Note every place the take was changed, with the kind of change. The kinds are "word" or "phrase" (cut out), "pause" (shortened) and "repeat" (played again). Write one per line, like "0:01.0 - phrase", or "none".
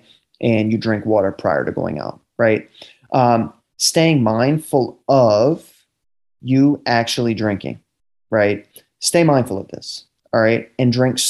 none